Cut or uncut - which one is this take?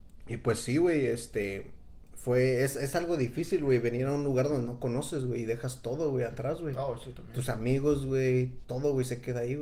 cut